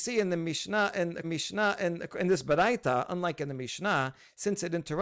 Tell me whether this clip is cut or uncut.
cut